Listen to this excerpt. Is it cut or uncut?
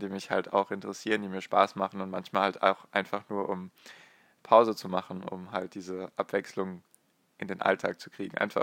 uncut